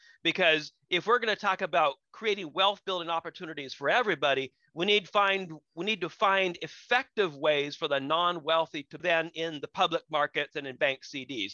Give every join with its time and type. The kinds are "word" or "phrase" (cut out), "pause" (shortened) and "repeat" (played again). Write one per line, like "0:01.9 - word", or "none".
0:02.0 - pause
0:09.0 - phrase